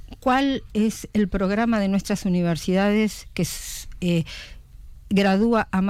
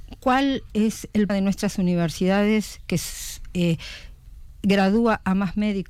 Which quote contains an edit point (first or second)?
second